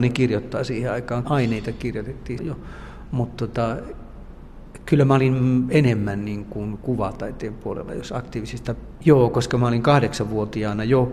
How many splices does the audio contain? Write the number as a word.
two